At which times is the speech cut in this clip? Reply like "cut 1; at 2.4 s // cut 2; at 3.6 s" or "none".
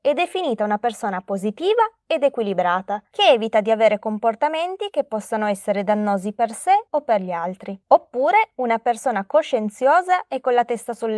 cut 1; at 6.9 s // cut 2; at 7.8 s